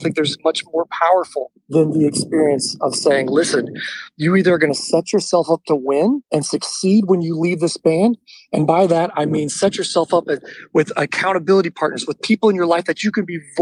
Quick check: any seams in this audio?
no; 0 cuts

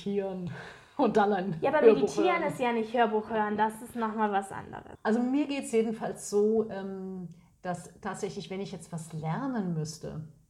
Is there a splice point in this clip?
no; 0 cuts

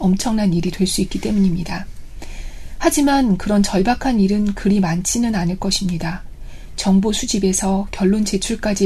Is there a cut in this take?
no; 0 cuts

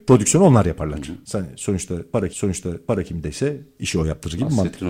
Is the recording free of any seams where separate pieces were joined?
no; 1 cut; at 2.3 s

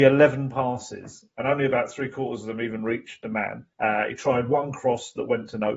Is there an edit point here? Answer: yes; 1 cut; at 3.7 s

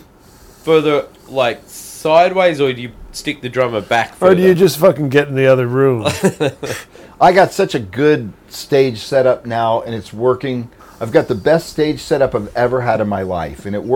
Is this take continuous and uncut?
yes; 0 cuts

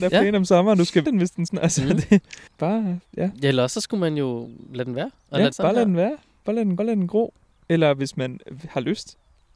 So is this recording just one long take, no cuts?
no; 5 cuts; at 1.0 s, 1.5 s, 2.5 s, 5.5 s, 6.8 s

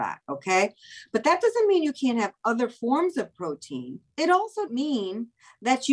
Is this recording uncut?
no; 2 cuts; at 4.1 s, 4.7 s

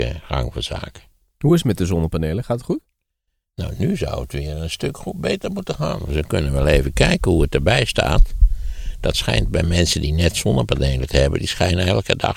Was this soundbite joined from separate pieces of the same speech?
no; 0 cuts

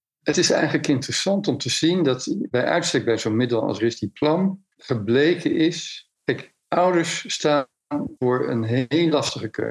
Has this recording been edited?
yes; 3 cuts; at 4.7 s, 6.1 s, 8.2 s

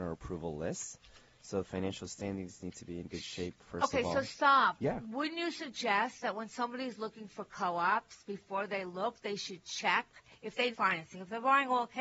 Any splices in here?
yes; 1 cut; at 10.7 s

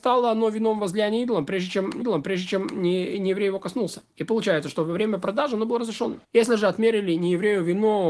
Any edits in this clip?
yes; 3 cuts; at 2.0 s, 4.1 s, 6.2 s

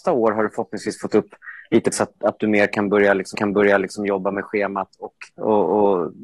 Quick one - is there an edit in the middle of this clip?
yes; 3 cuts; at 1.9 s, 3.3 s, 5.3 s

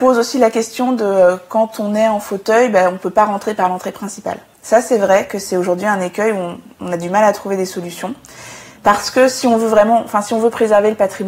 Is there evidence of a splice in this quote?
yes; 2 cuts; at 4.5 s, 8.7 s

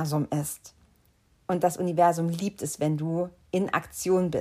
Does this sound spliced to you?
no; 0 cuts

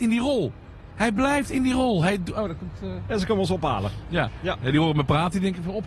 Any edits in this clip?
no; 0 cuts

